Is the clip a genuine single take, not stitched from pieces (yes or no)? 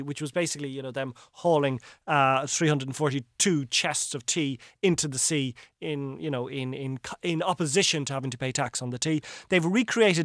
yes